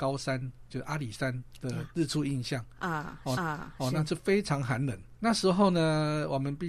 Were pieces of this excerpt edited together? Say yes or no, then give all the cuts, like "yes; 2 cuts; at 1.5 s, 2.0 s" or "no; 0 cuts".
yes; 2 cuts; at 3.4 s, 5.2 s